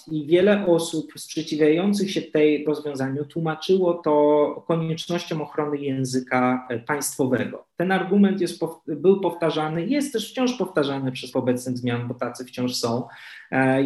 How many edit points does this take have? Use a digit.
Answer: 2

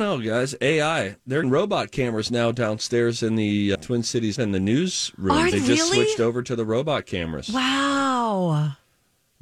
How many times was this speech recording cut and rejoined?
4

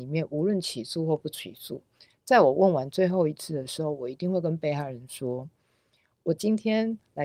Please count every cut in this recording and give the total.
0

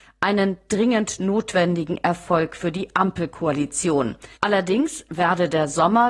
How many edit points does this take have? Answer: 1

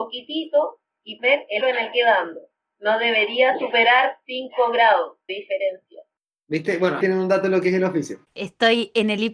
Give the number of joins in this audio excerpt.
6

